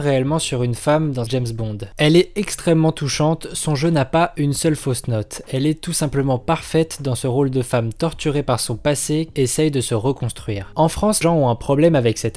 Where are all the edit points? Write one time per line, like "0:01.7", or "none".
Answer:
0:01.3
0:09.3
0:11.2